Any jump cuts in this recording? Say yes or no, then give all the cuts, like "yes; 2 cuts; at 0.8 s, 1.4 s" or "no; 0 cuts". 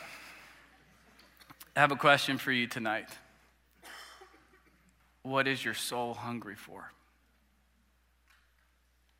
no; 0 cuts